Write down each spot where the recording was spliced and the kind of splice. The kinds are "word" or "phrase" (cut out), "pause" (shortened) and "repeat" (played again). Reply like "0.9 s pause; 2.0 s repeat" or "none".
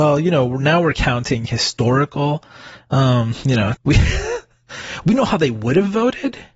3.8 s word